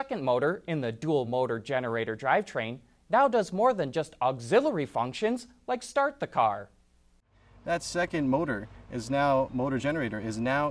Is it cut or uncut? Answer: uncut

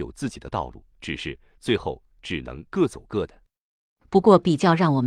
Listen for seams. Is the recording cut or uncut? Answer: cut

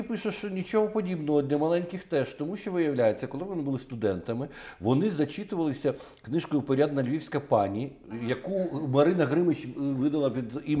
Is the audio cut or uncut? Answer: uncut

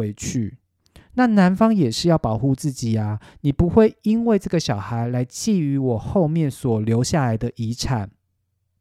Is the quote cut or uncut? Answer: uncut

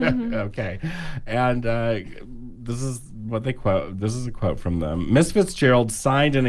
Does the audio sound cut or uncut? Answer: uncut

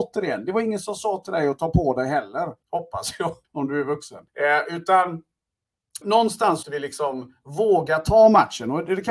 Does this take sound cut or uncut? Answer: cut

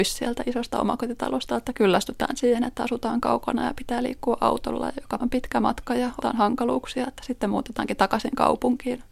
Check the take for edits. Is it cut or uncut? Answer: cut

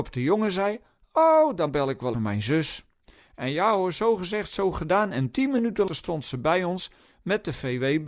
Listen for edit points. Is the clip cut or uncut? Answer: cut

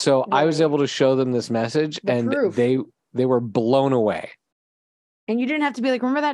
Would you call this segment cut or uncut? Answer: uncut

